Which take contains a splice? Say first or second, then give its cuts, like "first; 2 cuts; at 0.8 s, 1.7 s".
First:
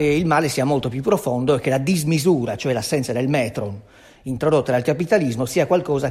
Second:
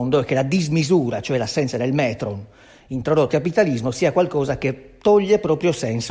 second; 1 cut; at 3.3 s